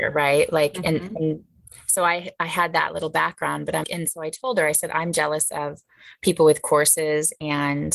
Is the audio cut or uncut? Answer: cut